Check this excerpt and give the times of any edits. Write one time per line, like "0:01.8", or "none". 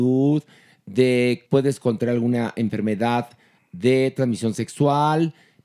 0:01.5